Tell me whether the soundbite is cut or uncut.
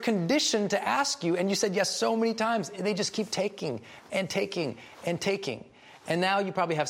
uncut